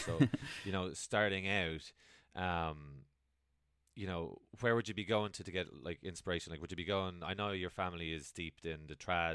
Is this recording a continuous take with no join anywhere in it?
yes; 0 cuts

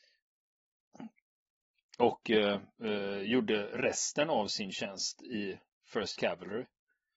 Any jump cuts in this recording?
no; 0 cuts

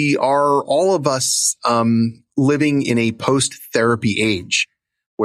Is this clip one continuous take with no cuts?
yes; 0 cuts

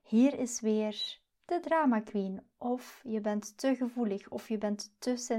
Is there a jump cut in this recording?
no; 0 cuts

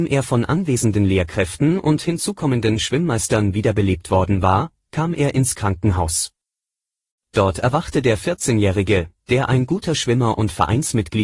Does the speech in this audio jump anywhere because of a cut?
no; 0 cuts

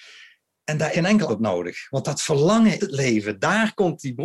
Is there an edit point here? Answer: yes; 3 cuts; at 0.9 s, 1.3 s, 2.8 s

